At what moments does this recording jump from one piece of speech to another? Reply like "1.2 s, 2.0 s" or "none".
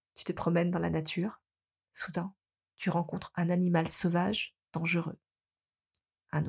none